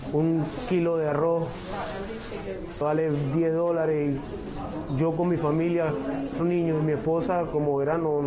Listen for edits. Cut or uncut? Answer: cut